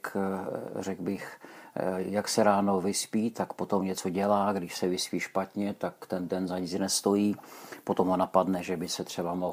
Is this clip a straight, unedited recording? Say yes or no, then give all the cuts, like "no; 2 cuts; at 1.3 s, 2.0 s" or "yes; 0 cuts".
yes; 0 cuts